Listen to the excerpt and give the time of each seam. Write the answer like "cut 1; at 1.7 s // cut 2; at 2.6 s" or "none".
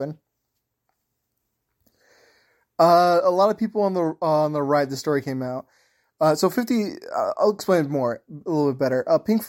none

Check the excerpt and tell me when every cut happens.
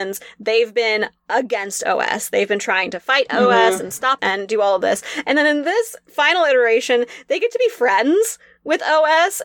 cut 1; at 4.2 s

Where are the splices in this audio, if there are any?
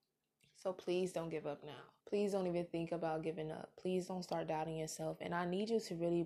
cut 1; at 2.0 s

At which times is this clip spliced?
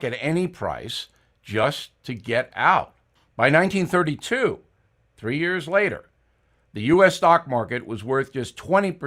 none

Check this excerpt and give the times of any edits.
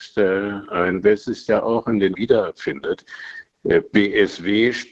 cut 1; at 1.0 s // cut 2; at 1.5 s // cut 3; at 2.1 s

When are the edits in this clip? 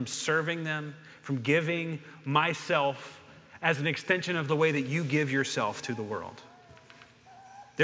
none

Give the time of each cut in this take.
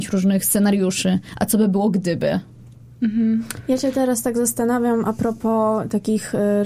none

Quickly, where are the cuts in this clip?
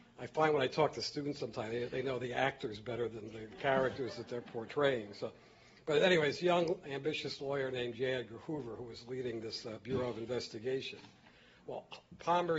none

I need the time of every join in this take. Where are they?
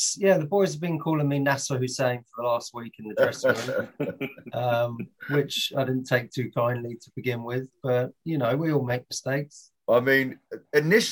cut 1; at 9.8 s

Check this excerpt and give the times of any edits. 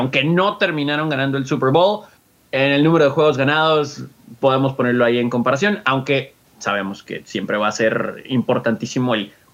none

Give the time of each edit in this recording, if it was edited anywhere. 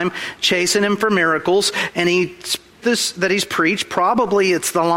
cut 1; at 2.8 s

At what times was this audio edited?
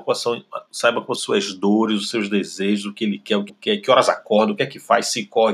cut 1; at 1.1 s // cut 2; at 3.5 s

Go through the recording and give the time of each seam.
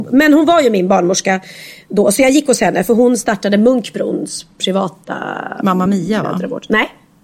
none

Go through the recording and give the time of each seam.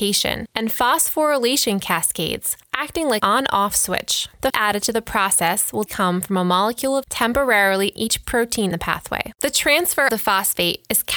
cut 1; at 3.2 s // cut 2; at 4.5 s // cut 3; at 5.9 s // cut 4; at 7.0 s // cut 5; at 8.0 s // cut 6; at 8.7 s // cut 7; at 10.1 s

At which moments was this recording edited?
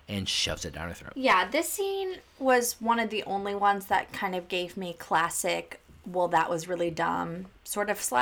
none

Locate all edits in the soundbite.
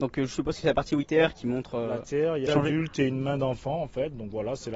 cut 1; at 1.0 s // cut 2; at 2.5 s

